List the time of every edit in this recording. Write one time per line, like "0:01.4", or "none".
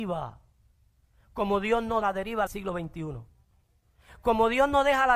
0:02.0
0:02.5